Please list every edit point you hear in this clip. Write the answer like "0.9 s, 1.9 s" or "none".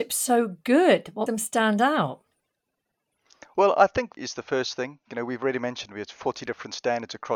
1.3 s, 4.2 s